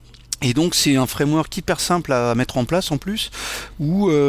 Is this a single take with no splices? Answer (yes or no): yes